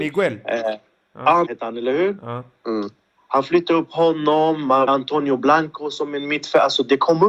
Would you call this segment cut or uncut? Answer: cut